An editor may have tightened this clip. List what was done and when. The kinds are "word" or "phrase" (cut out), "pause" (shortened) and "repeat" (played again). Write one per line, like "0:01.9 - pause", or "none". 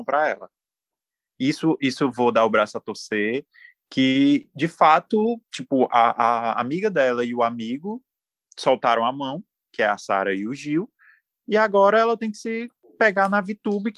0:02.1 - word

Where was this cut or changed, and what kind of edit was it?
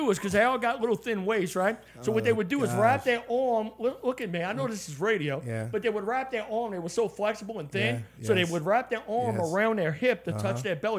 none

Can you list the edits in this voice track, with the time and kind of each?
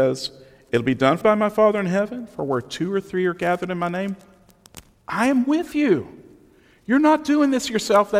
0:01.2 - word

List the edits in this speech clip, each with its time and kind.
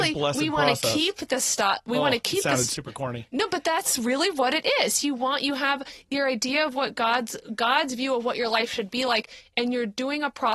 none

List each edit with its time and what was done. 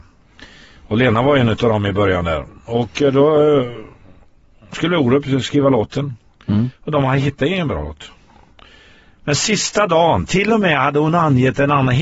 none

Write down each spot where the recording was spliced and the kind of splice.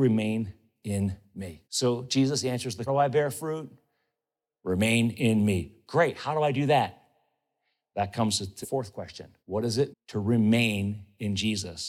0:01.6 - pause
0:02.9 - phrase
0:08.6 - word
0:09.4 - pause
0:09.9 - word

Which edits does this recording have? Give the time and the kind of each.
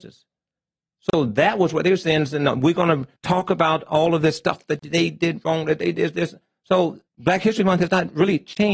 0:03.2 - pause
0:07.1 - pause

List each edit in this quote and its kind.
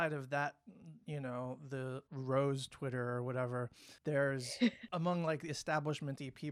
0:02.1 - pause
0:04.0 - pause

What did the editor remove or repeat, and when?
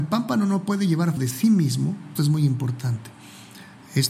0:01.2 - word
0:02.2 - word

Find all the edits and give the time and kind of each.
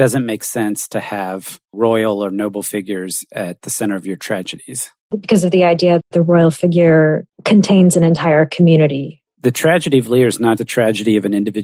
0:06.0 - word
0:10.6 - word

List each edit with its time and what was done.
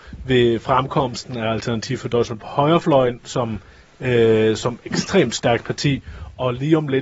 none

